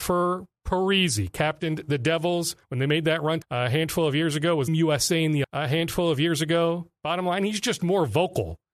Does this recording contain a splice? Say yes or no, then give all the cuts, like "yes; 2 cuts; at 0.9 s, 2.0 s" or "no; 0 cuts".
yes; 4 cuts; at 2.6 s, 3.4 s, 4.7 s, 5.4 s